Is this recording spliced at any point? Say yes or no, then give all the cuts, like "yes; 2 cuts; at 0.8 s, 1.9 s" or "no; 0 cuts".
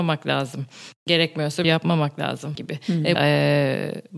yes; 3 cuts; at 1.6 s, 2.6 s, 3.2 s